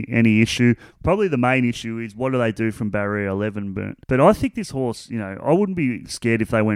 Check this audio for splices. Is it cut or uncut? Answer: uncut